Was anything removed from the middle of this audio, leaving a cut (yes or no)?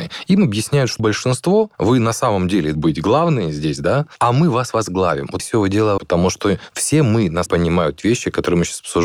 yes